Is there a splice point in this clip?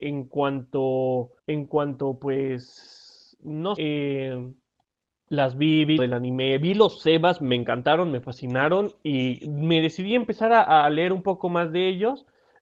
yes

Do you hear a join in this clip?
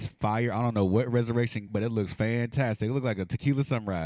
yes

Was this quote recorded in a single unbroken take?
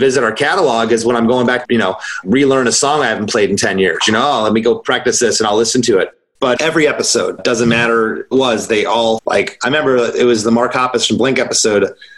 no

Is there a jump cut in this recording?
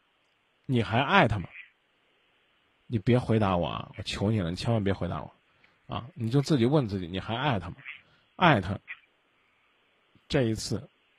no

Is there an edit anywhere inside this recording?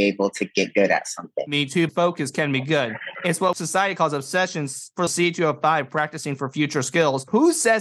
yes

